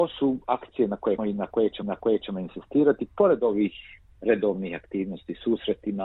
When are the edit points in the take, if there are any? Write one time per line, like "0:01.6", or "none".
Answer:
0:01.2
0:01.8